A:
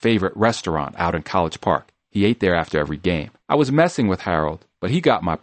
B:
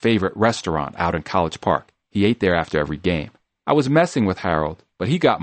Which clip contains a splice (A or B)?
A